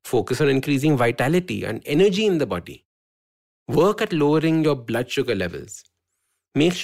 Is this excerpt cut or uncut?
uncut